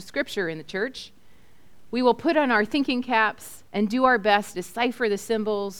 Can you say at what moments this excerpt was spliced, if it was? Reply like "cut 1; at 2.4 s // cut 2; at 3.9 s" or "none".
cut 1; at 3.7 s // cut 2; at 4.5 s

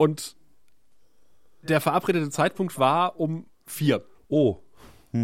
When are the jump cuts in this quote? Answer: none

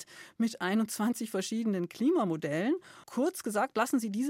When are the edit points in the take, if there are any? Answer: cut 1; at 3.0 s

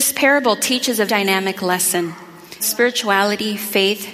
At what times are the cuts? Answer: cut 1; at 1.1 s // cut 2; at 2.6 s

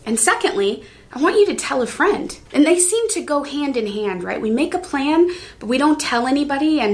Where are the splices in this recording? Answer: cut 1; at 2.5 s

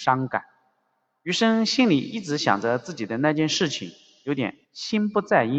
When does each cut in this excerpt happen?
cut 1; at 4.6 s

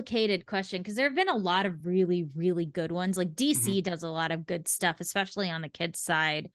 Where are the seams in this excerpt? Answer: none

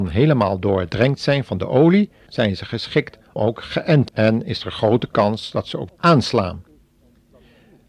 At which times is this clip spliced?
cut 1; at 2.3 s // cut 2; at 3.4 s // cut 3; at 4.1 s // cut 4; at 5.9 s

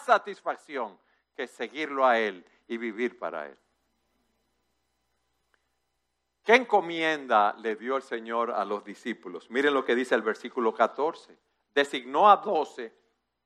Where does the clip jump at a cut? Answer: none

